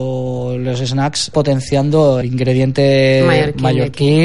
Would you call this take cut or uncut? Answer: cut